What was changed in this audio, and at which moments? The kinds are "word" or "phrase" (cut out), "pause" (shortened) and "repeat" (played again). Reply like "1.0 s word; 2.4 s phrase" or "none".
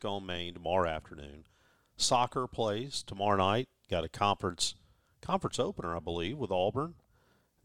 none